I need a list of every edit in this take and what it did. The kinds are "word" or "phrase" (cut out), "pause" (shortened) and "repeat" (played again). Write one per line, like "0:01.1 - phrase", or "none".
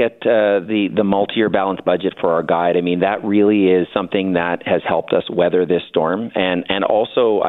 none